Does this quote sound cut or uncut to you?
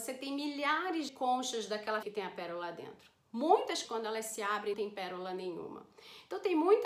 cut